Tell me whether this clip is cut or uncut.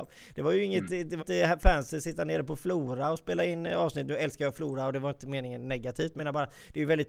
cut